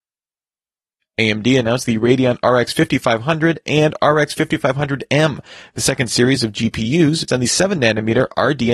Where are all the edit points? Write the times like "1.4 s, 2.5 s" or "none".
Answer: 7.3 s